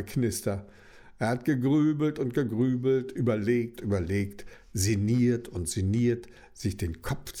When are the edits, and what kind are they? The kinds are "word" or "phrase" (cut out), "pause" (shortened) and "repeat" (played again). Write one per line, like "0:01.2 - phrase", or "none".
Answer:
0:03.8 - word

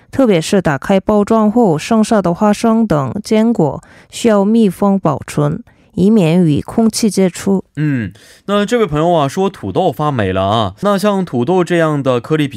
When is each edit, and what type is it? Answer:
0:10.8 - word

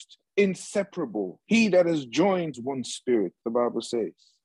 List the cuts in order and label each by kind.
0:01.4 - pause
0:02.5 - phrase

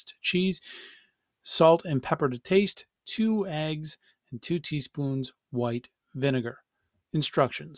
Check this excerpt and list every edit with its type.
none

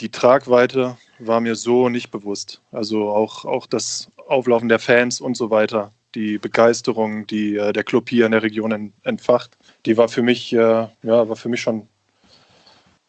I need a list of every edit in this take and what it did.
0:09.7 - pause
0:10.9 - pause

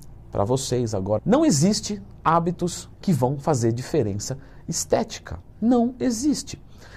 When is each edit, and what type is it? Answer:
0:01.2 - phrase
0:02.9 - word

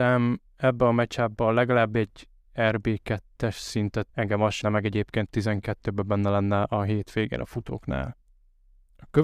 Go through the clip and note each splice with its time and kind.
0:04.1 - phrase
0:04.6 - word
0:05.3 - phrase

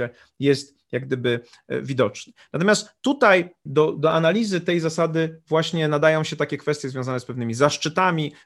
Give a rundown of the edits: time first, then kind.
0:03.7 - word

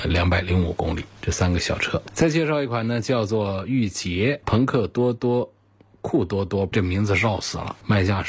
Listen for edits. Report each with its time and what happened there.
0:06.7 - phrase

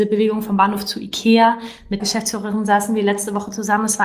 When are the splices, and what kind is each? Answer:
0:02.0 - word

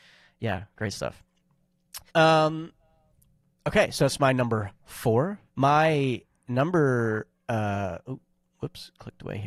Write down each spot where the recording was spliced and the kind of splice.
0:02.1 - pause
0:05.5 - pause

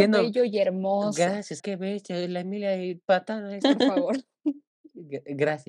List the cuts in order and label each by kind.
0:01.6 - word
0:03.6 - phrase

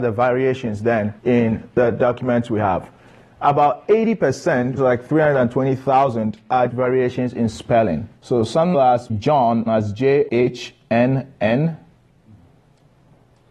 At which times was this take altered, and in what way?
0:01.2 - pause
0:04.8 - word
0:06.7 - word
0:08.2 - pause
0:08.7 - phrase
0:09.1 - word
0:09.7 - phrase
0:10.3 - word

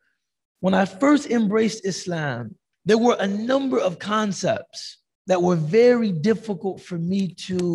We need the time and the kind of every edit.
0:02.7 - pause

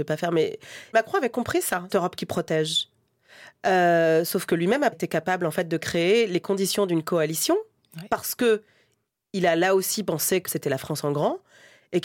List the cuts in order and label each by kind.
0:00.9 - word
0:01.9 - word
0:04.9 - word
0:10.5 - word

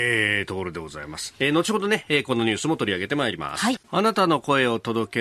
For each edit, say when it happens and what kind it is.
0:03.8 - pause

